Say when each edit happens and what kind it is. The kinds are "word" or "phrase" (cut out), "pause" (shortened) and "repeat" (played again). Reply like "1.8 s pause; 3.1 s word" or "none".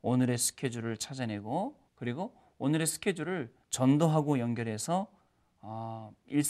1.9 s pause; 3.6 s pause